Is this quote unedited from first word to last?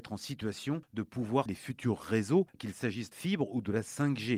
no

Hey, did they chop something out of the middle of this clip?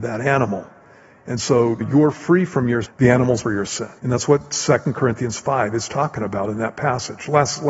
yes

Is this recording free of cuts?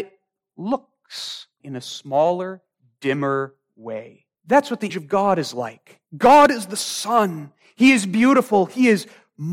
no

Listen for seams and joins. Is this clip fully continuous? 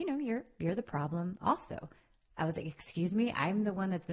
yes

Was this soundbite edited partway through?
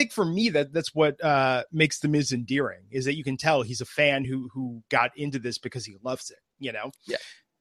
no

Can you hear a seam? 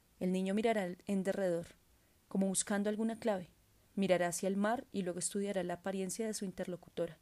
no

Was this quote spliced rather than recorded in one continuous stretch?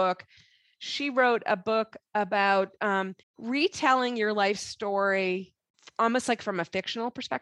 yes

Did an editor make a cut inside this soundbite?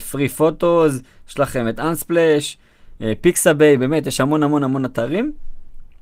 no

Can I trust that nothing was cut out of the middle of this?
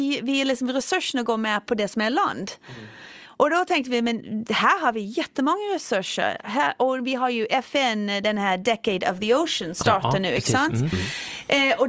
no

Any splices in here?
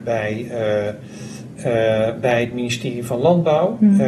no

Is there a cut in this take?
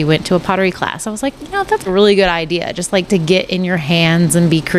yes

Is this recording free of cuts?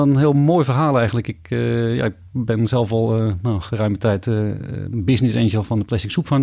yes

